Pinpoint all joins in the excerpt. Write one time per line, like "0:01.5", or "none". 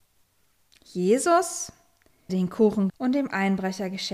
0:02.3
0:02.9

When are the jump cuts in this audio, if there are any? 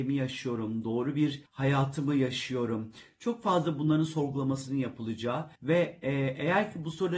0:01.5
0:05.6

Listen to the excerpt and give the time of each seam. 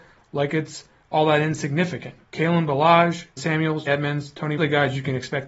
0:02.2
0:03.4
0:03.9
0:04.6

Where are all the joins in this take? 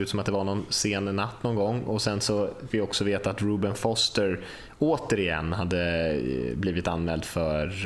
0:02.7

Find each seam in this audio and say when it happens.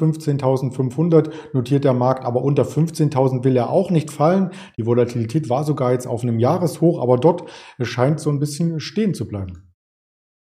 none

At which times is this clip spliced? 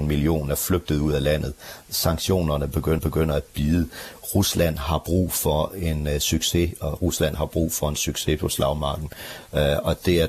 0:03.0

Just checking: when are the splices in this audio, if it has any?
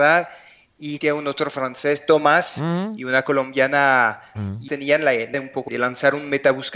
0:01.0
0:04.3
0:04.7
0:05.3
0:05.7

